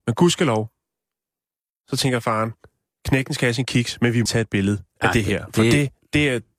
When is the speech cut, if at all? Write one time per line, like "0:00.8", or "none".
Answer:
0:04.3

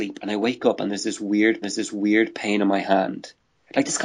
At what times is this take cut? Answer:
0:01.6

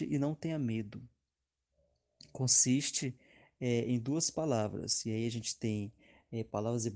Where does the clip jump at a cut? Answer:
none

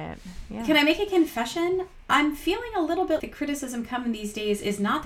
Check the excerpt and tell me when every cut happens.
0:03.2

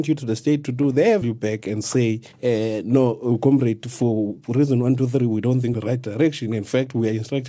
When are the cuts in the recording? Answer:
0:01.2
0:02.3
0:05.7

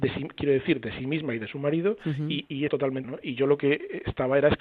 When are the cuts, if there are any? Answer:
0:02.7
0:03.0

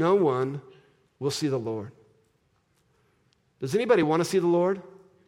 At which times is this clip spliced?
none

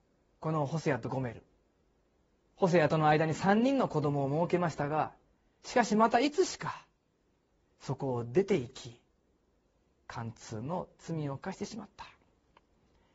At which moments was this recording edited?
none

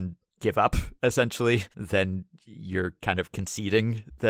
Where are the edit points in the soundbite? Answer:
0:01.7

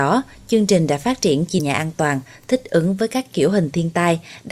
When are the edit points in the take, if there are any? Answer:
0:01.6

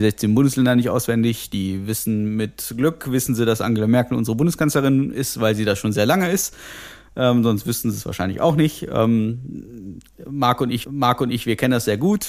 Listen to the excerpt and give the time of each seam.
0:10.8

